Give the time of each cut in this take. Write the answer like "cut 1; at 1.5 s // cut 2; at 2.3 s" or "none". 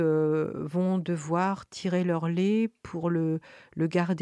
none